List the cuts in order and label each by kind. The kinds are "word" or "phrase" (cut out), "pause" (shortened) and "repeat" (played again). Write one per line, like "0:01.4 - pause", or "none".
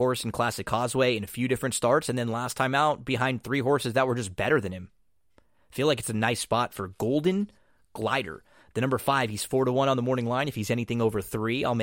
none